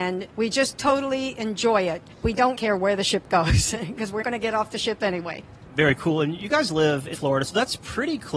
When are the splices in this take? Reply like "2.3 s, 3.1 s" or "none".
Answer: 2.1 s, 2.5 s, 4.2 s, 7.1 s